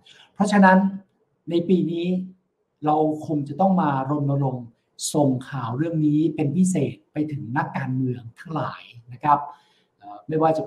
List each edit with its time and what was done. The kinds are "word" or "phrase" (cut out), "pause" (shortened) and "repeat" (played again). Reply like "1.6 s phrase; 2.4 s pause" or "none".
none

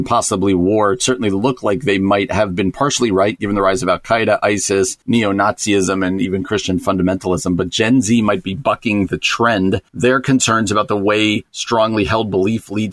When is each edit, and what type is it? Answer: 5.0 s pause; 9.9 s pause

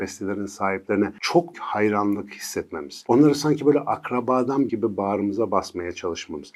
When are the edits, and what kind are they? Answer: 1.5 s word; 4.7 s word

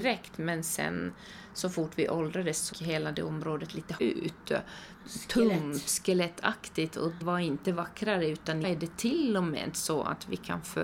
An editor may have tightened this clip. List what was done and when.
2.7 s word; 4.0 s word; 7.2 s word; 8.6 s word

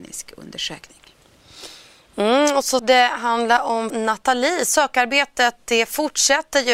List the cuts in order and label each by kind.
2.8 s word; 3.9 s word

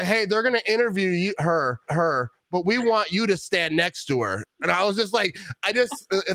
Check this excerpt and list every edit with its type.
1.9 s repeat

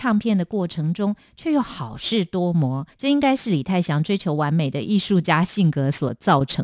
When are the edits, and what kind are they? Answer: 2.9 s pause

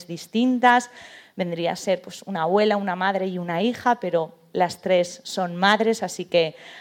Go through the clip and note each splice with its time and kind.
none

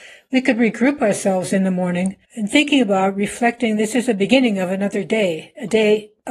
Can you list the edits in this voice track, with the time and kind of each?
2.2 s pause

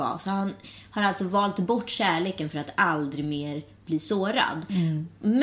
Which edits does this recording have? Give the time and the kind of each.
none

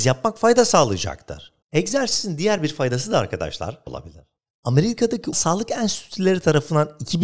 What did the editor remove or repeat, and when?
1.6 s pause; 3.9 s phrase; 5.3 s word

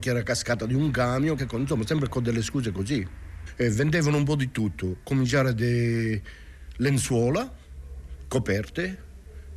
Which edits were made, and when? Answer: 1.4 s word

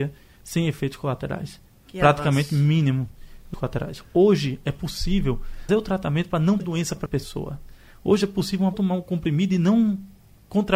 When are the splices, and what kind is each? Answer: 3.5 s word; 5.7 s word; 6.6 s word; 7.1 s word; 8.7 s word

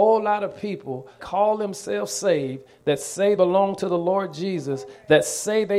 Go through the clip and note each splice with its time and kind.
1.2 s word; 3.4 s word

